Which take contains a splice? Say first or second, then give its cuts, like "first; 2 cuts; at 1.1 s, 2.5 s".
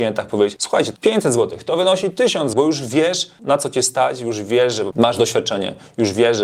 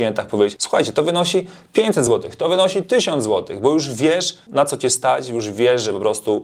first; 3 cuts; at 1.0 s, 2.5 s, 4.9 s